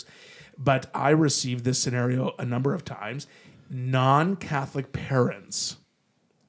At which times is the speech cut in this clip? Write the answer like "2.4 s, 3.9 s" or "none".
0.9 s